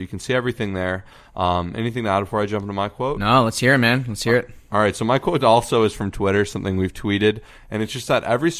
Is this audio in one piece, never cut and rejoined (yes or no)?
yes